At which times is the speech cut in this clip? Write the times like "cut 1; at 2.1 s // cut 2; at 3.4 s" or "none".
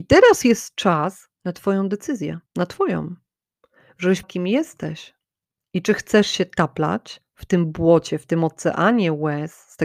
cut 1; at 1.4 s // cut 2; at 2.5 s // cut 3; at 4.2 s // cut 4; at 5.4 s